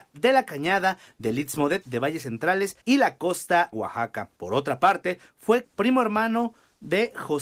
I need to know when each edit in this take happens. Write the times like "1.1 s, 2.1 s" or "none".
1.8 s, 2.8 s, 3.7 s, 4.4 s, 5.6 s